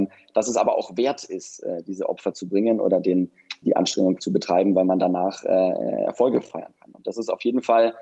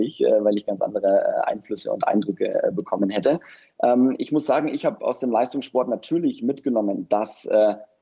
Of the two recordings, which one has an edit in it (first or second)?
first